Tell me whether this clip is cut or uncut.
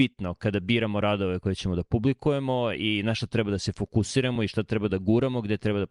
uncut